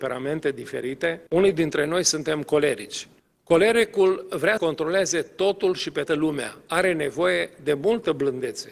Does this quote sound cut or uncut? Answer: cut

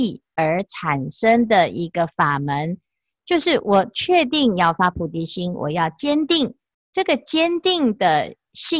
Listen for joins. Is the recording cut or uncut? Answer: uncut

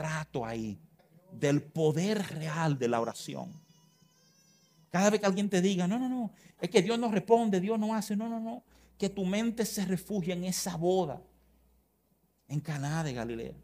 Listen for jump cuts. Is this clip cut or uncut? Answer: cut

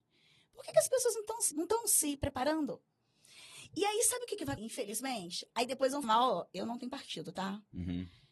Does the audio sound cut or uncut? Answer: cut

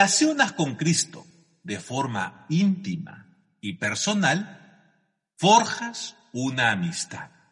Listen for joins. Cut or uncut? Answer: uncut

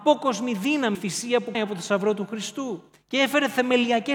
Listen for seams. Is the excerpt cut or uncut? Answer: cut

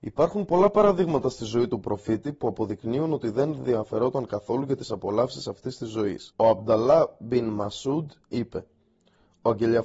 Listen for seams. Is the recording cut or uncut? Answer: cut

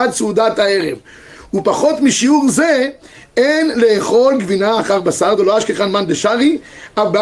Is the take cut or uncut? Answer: uncut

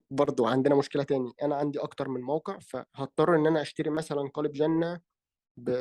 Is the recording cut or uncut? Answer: cut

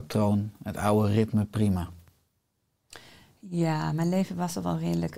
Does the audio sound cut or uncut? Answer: uncut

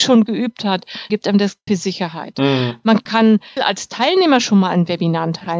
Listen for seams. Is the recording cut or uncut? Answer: cut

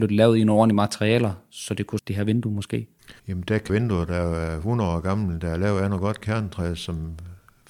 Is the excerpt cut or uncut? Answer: cut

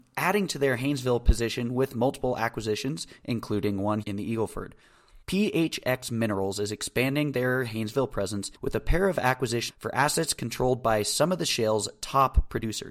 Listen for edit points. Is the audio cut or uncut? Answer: cut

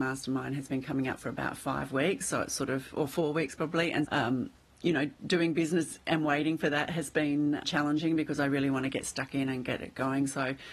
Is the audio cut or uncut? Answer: cut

